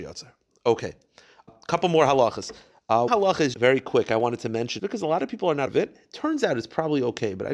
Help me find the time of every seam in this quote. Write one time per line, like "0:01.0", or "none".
0:01.5
0:03.1
0:03.5
0:04.8
0:05.7